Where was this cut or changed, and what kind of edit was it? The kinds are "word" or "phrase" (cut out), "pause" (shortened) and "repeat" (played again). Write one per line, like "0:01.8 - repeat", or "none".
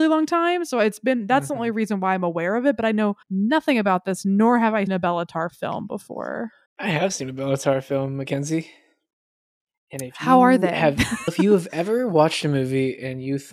0:03.2 - pause
0:04.9 - word
0:06.7 - pause
0:11.3 - word